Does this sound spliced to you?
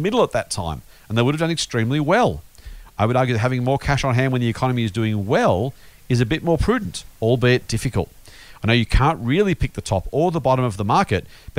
no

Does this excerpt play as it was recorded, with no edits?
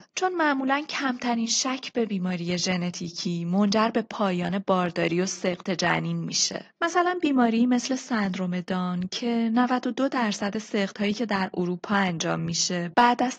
yes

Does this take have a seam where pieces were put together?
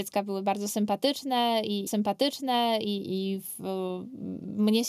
yes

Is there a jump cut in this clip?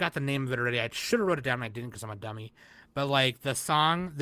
no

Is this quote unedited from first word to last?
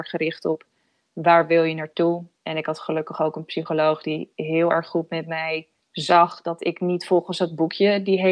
no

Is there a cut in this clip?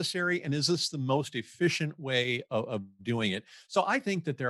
no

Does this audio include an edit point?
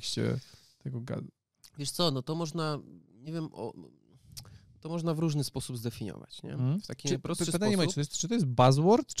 no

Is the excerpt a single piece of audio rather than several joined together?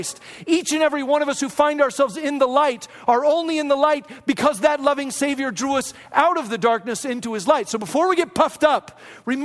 yes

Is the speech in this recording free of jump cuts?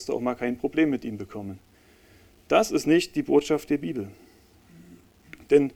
yes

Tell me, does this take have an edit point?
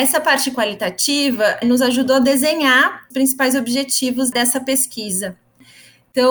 yes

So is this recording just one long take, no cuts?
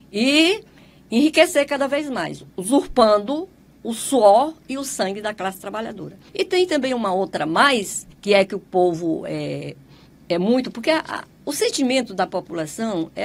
no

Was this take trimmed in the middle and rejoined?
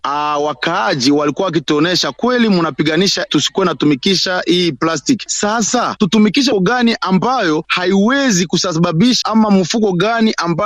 yes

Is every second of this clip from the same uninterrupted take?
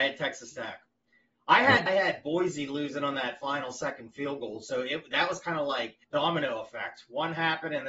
no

